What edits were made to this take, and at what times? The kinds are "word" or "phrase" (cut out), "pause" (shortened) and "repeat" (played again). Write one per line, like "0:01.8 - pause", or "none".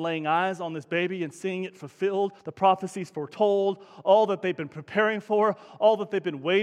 0:02.4 - pause